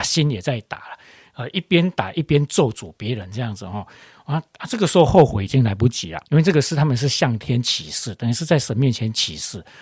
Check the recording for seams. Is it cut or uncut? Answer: cut